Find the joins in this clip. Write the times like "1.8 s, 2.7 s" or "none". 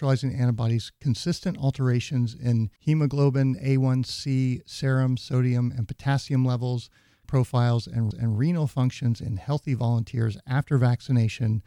2.8 s, 7.2 s, 8.1 s

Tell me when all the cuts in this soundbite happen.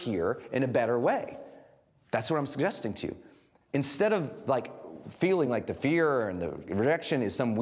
none

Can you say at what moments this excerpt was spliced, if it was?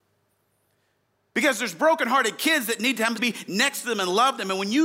3.2 s

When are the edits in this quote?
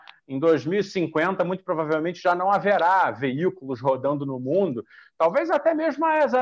none

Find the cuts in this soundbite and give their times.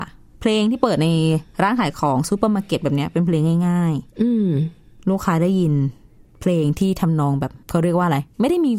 1.5 s, 6.2 s, 7.6 s

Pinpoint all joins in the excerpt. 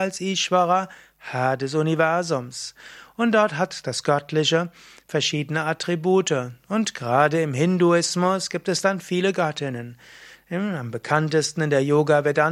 none

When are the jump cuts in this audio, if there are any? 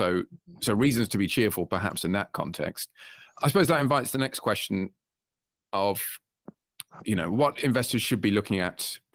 none

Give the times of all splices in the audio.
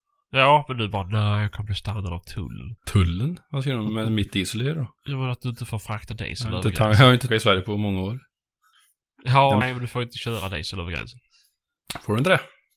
2.8 s, 5.0 s, 7.3 s, 8.7 s, 9.6 s

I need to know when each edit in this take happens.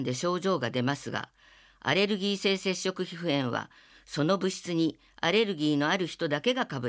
none

